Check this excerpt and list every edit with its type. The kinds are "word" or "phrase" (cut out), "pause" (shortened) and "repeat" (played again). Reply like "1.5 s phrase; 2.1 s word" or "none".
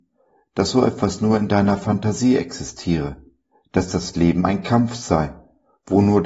none